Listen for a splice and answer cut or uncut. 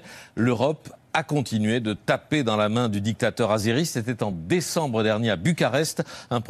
uncut